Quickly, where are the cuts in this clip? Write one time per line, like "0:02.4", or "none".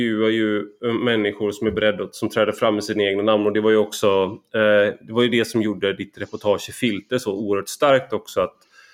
none